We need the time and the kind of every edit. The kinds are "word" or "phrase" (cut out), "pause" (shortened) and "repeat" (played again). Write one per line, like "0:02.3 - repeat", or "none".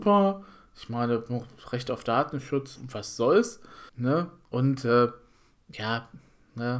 0:02.8 - phrase
0:03.9 - pause

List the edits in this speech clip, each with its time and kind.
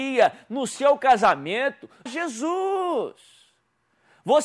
0:02.1 - phrase

